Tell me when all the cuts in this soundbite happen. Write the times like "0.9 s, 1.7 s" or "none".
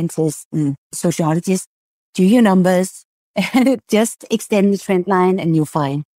none